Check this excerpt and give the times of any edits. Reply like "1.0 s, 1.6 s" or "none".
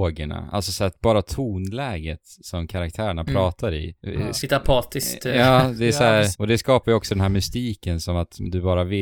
4.0 s, 6.3 s